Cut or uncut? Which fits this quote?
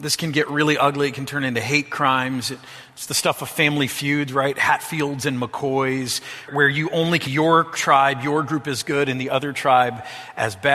cut